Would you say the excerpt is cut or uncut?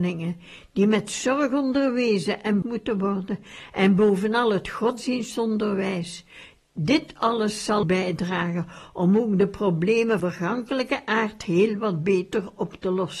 cut